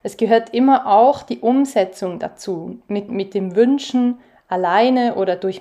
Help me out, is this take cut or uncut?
cut